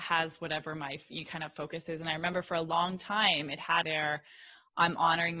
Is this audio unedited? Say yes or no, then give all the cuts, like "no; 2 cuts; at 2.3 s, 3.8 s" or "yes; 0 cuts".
no; 1 cut; at 3.8 s